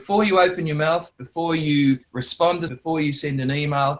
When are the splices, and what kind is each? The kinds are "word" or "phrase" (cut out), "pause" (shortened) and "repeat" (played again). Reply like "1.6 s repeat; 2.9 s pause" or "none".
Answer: 2.0 s pause; 2.7 s word